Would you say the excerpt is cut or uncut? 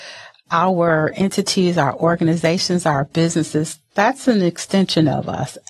uncut